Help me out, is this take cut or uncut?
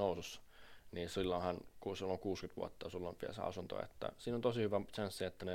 uncut